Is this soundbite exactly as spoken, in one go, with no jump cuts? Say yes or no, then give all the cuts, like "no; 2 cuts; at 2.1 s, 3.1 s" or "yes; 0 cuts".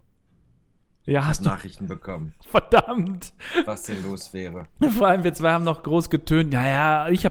no; 1 cut; at 2.4 s